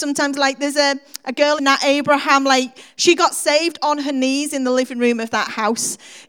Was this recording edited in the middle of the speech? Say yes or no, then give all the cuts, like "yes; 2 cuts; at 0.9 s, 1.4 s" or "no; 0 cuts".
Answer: yes; 1 cut; at 1.6 s